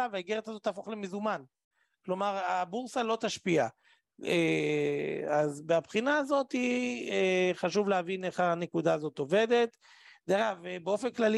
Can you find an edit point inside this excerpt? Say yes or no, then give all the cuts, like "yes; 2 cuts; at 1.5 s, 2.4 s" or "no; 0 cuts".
no; 0 cuts